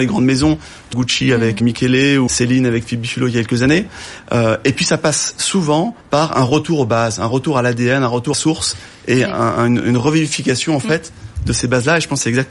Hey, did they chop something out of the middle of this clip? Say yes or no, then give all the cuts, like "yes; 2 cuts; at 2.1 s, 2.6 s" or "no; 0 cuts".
yes; 5 cuts; at 0.9 s, 1.6 s, 2.3 s, 6.0 s, 8.3 s